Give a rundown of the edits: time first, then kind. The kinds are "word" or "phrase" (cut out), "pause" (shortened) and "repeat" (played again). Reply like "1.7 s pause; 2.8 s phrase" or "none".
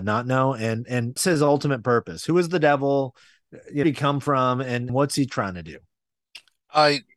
1.2 s word; 3.8 s phrase; 4.9 s word